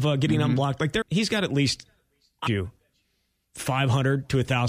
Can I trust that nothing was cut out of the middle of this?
no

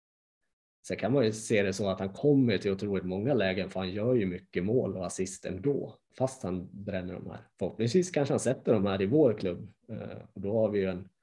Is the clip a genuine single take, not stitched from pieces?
no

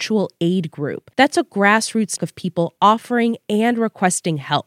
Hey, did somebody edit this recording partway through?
yes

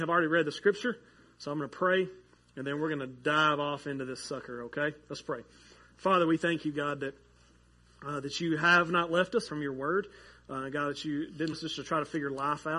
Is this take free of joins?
no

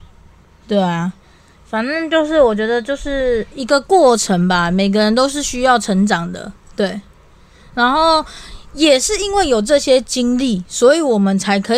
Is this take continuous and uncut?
yes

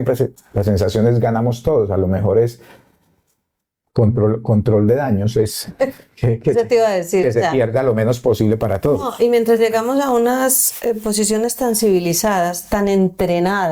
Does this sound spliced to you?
no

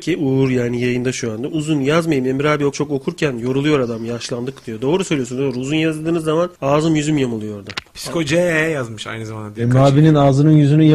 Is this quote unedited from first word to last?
no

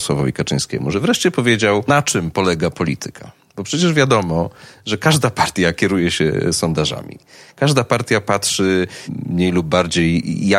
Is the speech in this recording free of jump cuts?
yes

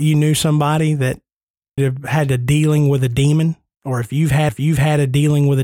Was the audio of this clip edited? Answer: yes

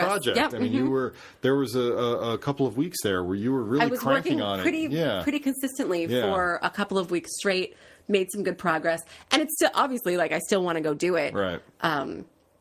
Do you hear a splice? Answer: no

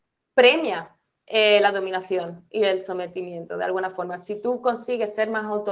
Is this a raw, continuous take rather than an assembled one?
yes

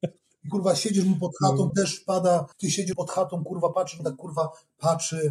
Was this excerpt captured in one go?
no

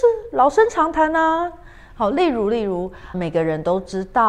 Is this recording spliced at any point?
yes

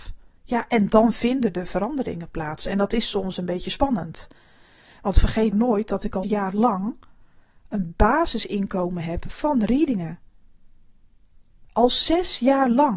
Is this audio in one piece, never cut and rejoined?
no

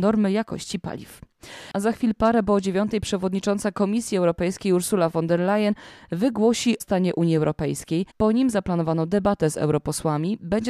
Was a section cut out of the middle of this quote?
yes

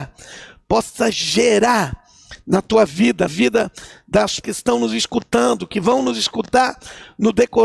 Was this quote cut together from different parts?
yes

